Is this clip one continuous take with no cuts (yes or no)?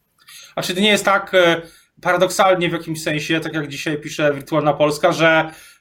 yes